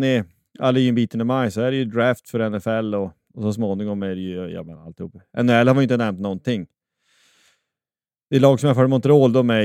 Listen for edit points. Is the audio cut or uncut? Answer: uncut